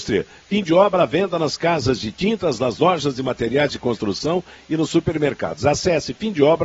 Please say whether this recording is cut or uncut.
uncut